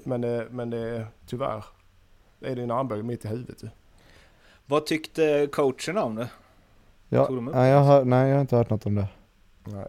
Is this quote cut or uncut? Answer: uncut